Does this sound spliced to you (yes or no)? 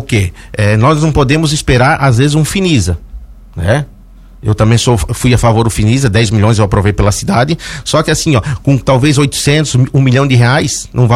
no